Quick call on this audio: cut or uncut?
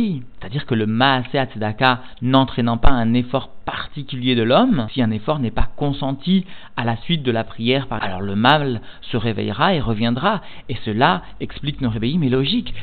cut